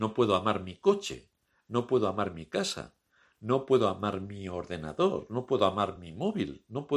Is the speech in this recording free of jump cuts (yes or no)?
yes